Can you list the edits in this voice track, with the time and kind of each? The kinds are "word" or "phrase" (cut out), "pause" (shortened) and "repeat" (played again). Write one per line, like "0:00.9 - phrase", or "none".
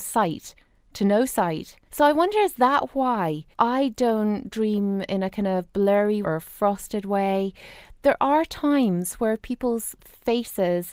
0:01.8 - pause
0:03.5 - pause
0:06.2 - word